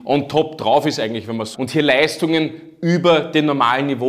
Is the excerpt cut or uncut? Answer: cut